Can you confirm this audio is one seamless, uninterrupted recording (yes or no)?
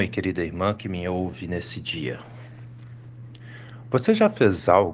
yes